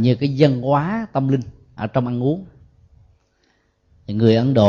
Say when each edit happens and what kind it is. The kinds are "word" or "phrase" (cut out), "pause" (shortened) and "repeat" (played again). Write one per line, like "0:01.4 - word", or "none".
none